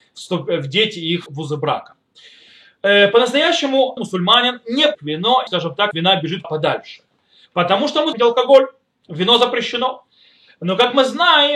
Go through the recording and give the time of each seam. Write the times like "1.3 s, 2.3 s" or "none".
1.3 s, 4.0 s, 4.9 s, 5.5 s, 5.9 s, 6.4 s, 8.1 s

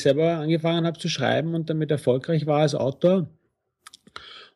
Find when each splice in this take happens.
none

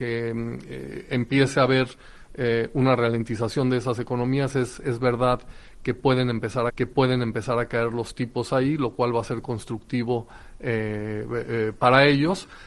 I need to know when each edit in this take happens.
6.7 s

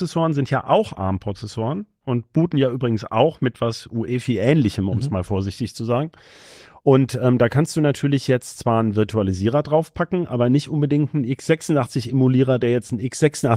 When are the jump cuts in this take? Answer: none

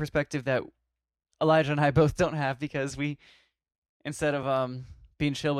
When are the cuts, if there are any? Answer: none

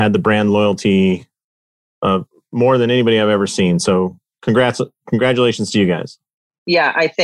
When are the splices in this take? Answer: none

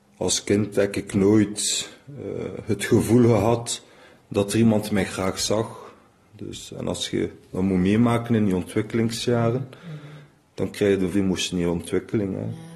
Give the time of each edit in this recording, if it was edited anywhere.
11.1 s

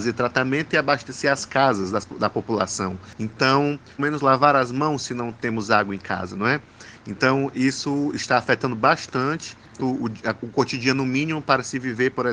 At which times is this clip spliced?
4.0 s, 9.8 s

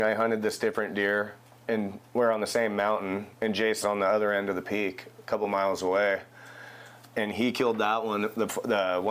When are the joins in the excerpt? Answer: 3.3 s, 3.8 s

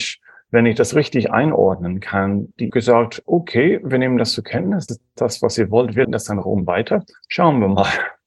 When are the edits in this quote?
2.7 s, 4.9 s, 6.0 s

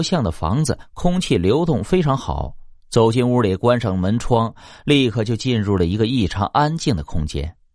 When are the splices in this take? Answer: none

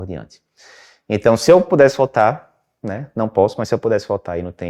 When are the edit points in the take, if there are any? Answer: none

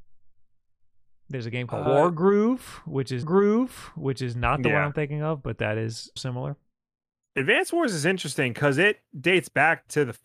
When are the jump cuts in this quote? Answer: 1.9 s, 3.2 s, 6.2 s

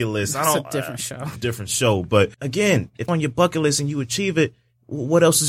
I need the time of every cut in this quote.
1.4 s, 2.3 s, 3.1 s

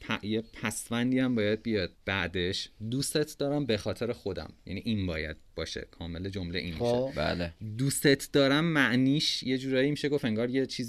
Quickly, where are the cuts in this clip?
1.9 s

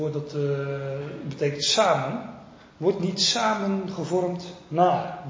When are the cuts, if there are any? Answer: none

